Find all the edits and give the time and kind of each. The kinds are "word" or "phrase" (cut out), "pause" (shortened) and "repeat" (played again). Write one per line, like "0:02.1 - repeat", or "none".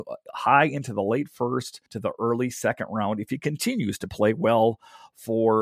0:01.9 - pause

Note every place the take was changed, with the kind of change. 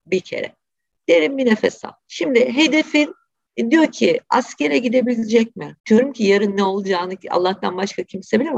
0:02.0 - pause
0:05.8 - pause

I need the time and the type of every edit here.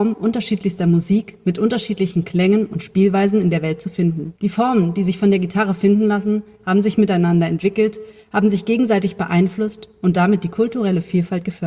0:04.4 - pause

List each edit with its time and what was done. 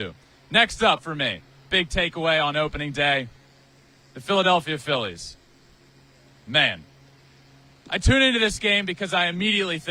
none

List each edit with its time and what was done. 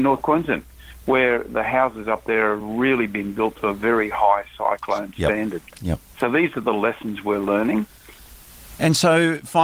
none

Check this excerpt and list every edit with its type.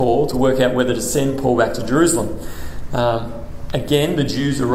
none

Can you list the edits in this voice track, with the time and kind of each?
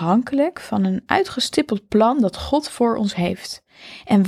none

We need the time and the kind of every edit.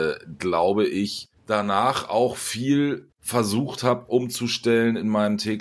0:01.4 - pause
0:03.1 - pause

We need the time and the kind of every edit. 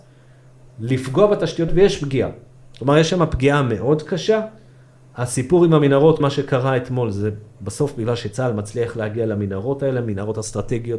0:01.7 - word
0:06.2 - word

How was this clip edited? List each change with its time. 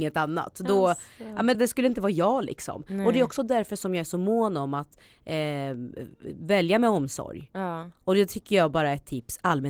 0:01.5 - word

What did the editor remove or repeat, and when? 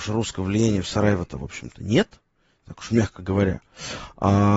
none

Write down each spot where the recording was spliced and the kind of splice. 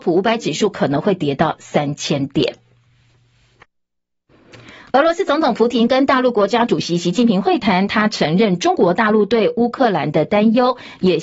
none

